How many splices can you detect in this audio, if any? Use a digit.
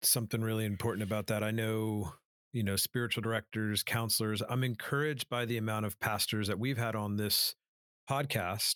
1